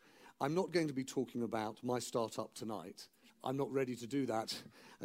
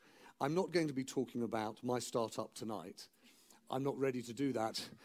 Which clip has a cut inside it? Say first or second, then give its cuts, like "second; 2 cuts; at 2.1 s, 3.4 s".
first; 1 cut; at 3.3 s